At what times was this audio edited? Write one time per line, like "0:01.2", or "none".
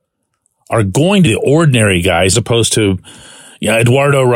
0:01.3
0:02.3